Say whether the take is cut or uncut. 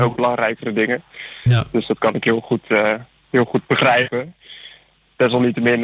uncut